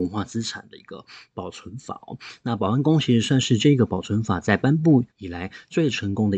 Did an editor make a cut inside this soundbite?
yes; 1 cut; at 5.1 s

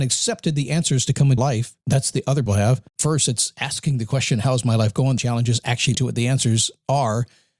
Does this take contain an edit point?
yes; 6 cuts; at 1.4 s, 1.8 s, 2.5 s, 2.9 s, 5.2 s, 5.9 s

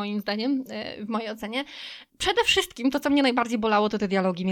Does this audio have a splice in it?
no; 0 cuts

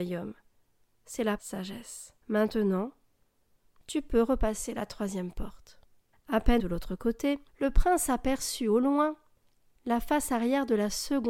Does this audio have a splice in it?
yes; 5 cuts; at 1.4 s, 2.2 s, 6.1 s, 6.6 s, 7.5 s

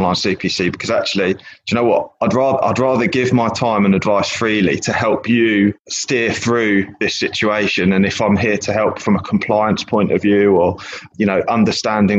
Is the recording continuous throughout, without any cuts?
yes; 0 cuts

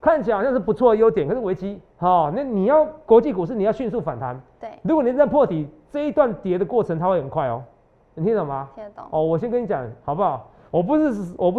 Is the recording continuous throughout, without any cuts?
no; 2 cuts; at 1.9 s, 7.9 s

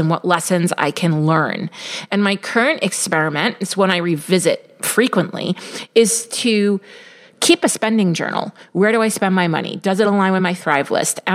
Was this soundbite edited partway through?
no; 0 cuts

